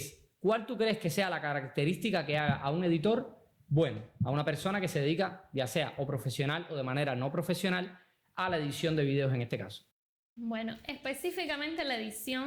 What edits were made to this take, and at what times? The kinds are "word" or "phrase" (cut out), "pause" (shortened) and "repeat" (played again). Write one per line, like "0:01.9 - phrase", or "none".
none